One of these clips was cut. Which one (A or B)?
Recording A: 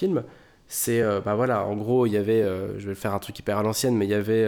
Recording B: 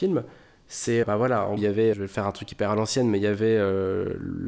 B